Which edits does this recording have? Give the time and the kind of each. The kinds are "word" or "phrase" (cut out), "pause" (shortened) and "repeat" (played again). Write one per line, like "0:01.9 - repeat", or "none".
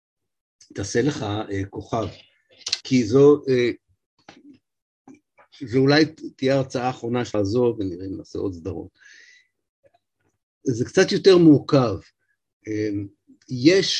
0:02.8 - word
0:07.3 - word